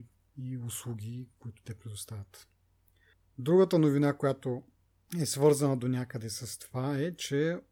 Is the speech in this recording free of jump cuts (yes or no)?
yes